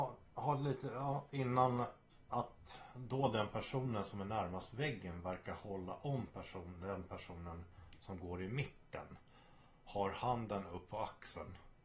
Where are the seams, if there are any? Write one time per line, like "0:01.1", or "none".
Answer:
none